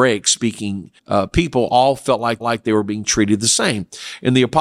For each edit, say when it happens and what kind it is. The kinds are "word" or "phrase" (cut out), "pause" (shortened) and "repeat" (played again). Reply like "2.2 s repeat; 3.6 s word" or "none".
1.0 s pause; 2.4 s repeat